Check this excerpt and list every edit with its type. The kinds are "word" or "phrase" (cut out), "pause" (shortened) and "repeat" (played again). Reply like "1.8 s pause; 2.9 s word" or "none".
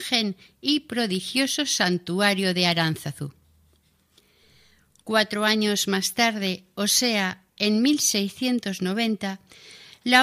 none